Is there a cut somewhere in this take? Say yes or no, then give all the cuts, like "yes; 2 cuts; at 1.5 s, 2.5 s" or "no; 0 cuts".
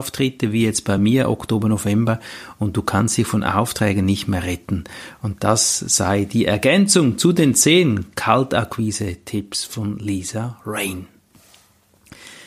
no; 0 cuts